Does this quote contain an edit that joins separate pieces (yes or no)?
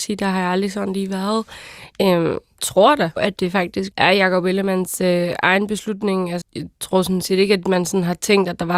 yes